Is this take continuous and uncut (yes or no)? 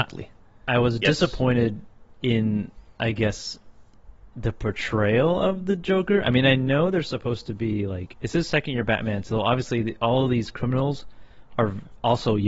yes